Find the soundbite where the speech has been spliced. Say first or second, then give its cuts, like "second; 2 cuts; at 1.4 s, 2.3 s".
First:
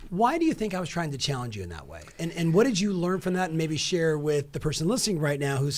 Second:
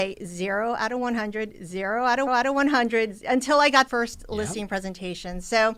second; 2 cuts; at 2.3 s, 3.9 s